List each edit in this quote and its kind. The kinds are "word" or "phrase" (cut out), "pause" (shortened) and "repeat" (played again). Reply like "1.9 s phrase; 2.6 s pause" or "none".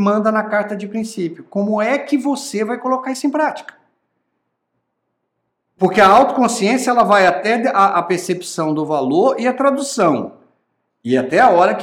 none